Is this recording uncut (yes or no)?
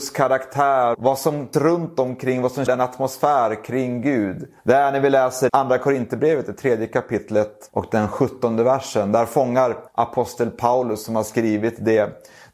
no